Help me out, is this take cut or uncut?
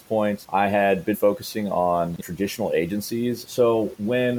cut